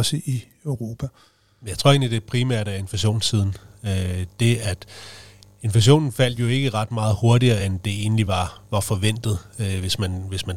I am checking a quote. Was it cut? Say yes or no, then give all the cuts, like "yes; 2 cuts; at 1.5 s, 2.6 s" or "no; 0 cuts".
no; 0 cuts